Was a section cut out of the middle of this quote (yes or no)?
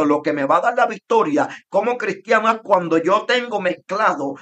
no